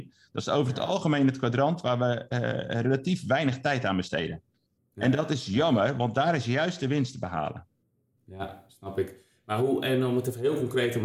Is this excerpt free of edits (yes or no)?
yes